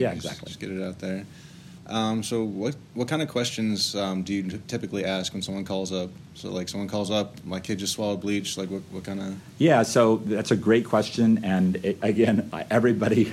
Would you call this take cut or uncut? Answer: uncut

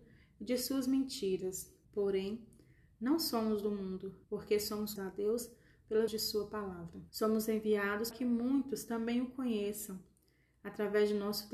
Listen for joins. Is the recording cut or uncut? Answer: cut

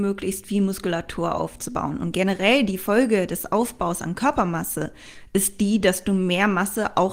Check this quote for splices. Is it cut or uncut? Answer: uncut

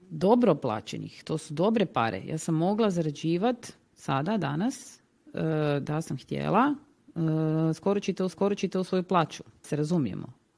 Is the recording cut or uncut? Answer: cut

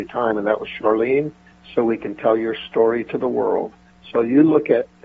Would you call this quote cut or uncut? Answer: uncut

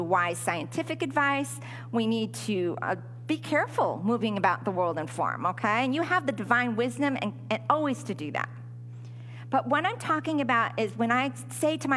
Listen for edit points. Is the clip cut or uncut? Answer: uncut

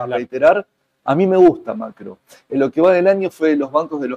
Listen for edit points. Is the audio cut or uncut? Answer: uncut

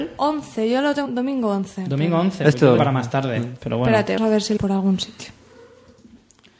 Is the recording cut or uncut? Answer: cut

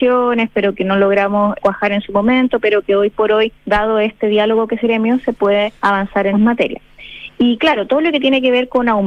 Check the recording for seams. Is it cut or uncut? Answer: cut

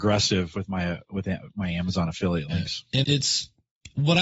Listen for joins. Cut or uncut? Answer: cut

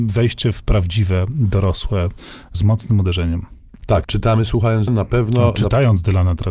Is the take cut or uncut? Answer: cut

